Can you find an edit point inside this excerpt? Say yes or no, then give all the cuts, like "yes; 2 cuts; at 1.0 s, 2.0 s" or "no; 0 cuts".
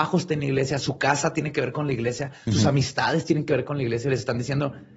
no; 0 cuts